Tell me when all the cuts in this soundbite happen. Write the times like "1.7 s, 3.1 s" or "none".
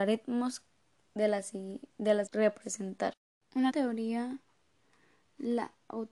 2.3 s, 3.7 s